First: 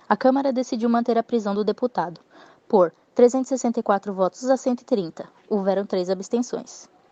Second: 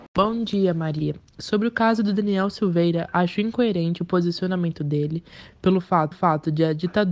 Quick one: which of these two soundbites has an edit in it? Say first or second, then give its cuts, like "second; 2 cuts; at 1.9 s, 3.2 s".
second; 1 cut; at 6.1 s